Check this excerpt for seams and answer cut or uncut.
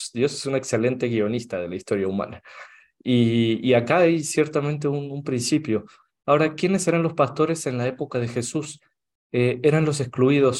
uncut